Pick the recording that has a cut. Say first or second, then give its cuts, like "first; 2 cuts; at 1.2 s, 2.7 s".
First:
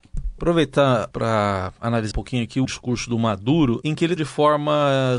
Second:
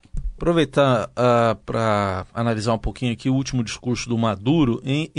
first; 5 cuts; at 1.1 s, 2.1 s, 2.6 s, 3.8 s, 4.2 s